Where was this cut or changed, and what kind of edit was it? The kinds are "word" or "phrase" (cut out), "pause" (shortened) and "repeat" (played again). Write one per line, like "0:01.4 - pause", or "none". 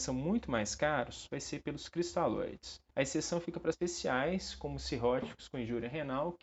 0:01.3 - phrase
0:02.9 - pause
0:03.7 - word

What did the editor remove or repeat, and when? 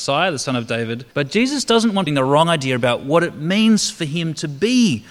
0:01.1 - pause
0:02.1 - phrase

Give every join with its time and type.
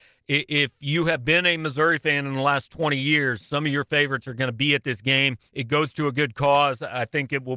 0:05.5 - pause

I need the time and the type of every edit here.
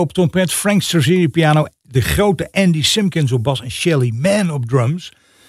none

